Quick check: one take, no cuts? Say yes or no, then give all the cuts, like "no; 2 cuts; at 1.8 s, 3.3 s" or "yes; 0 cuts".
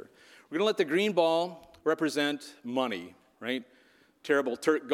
no; 2 cuts; at 1.8 s, 3.3 s